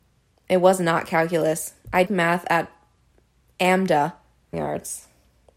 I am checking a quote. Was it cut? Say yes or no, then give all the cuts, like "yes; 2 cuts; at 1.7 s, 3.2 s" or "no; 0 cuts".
yes; 2 cuts; at 2.1 s, 4.5 s